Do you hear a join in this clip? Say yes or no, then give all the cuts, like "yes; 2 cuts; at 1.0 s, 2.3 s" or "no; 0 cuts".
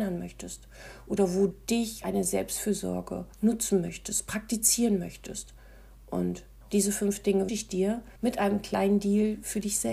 yes; 5 cuts; at 1.5 s, 2.0 s, 3.3 s, 7.5 s, 8.2 s